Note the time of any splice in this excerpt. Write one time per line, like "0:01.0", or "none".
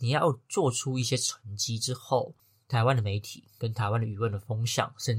none

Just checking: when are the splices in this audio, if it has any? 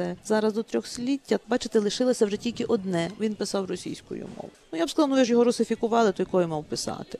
none

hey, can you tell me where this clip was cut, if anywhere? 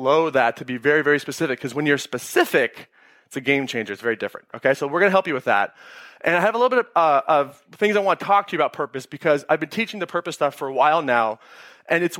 none

